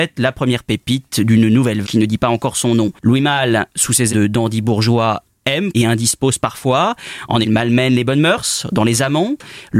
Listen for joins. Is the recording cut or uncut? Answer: cut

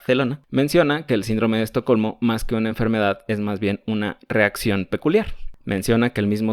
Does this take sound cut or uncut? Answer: uncut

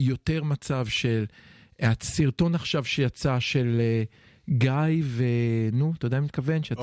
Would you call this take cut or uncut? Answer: uncut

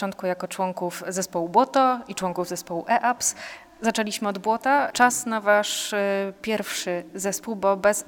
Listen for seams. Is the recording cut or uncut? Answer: uncut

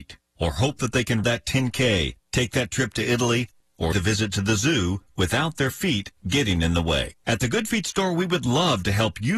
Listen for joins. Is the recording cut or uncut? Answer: cut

